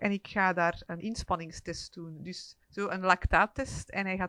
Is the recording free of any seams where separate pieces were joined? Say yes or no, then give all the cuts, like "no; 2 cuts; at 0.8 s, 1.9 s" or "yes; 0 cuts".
no; 2 cuts; at 1.0 s, 2.6 s